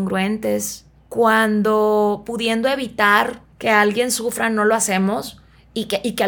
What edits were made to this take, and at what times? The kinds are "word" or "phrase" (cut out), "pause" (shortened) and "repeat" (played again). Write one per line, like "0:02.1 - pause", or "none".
0:01.0 - pause
0:03.5 - pause